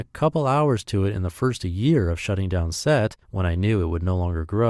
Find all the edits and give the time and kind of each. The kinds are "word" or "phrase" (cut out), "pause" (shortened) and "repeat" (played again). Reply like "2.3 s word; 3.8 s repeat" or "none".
3.2 s pause